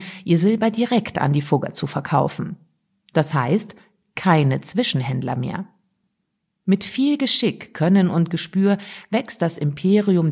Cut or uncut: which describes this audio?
uncut